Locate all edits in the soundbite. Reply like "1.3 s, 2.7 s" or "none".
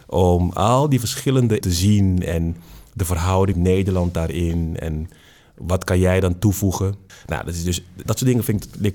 1.6 s, 3.5 s, 8.1 s